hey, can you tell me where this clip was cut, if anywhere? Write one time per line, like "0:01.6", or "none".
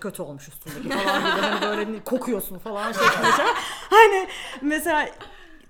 none